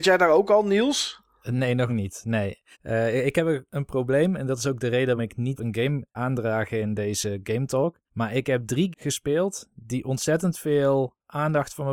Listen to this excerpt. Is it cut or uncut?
cut